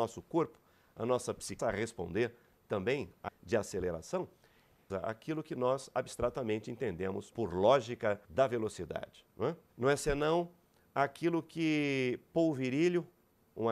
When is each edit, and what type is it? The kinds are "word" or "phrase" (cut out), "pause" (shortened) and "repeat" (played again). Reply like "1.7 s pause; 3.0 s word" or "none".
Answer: 1.6 s word; 3.3 s phrase; 4.9 s phrase; 7.3 s word; 8.3 s pause; 9.7 s pause